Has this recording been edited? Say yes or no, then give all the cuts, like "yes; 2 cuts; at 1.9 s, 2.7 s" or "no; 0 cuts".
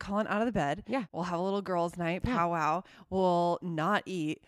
no; 0 cuts